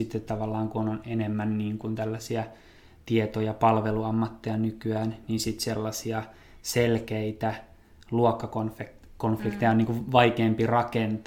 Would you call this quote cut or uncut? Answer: uncut